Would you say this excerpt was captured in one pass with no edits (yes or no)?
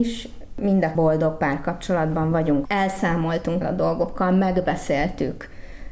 no